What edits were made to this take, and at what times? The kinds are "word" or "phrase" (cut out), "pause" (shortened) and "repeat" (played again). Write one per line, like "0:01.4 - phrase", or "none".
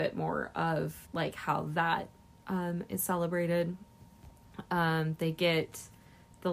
0:01.0 - pause

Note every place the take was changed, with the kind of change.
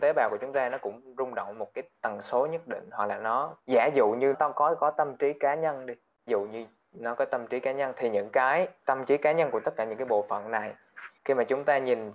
0:03.6 - pause
0:04.3 - word
0:06.3 - word
0:11.2 - pause

